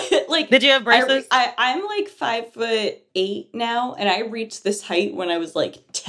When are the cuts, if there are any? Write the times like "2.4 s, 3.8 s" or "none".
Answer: 3.1 s